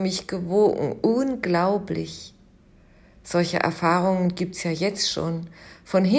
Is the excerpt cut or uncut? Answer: uncut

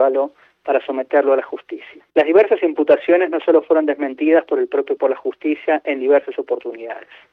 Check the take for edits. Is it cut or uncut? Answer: cut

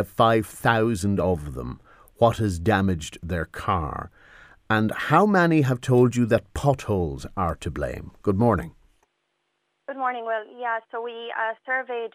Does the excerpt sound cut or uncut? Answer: uncut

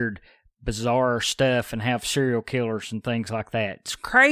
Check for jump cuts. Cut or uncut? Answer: uncut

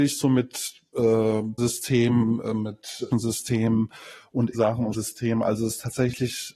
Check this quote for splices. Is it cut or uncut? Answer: cut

